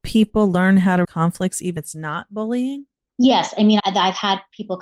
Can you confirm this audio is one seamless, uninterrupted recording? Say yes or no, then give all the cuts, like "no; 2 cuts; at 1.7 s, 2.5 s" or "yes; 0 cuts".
no; 3 cuts; at 1.0 s, 1.8 s, 3.8 s